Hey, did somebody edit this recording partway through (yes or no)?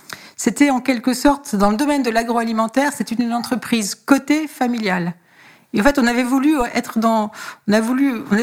no